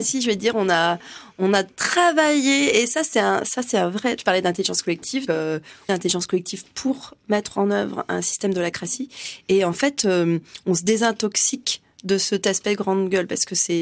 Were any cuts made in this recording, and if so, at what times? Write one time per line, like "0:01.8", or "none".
0:05.3
0:05.9